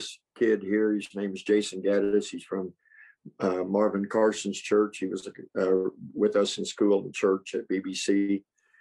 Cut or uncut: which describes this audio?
uncut